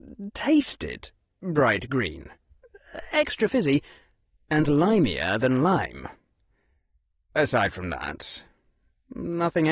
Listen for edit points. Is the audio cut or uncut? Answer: uncut